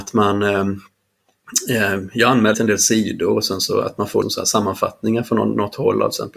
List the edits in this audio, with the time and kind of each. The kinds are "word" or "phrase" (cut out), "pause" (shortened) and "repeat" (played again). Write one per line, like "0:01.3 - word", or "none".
0:02.5 - word
0:04.2 - word